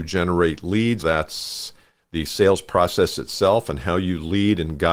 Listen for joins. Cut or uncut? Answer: cut